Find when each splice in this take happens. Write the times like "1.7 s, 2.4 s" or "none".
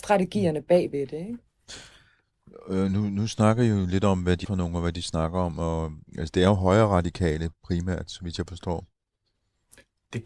4.4 s, 6.1 s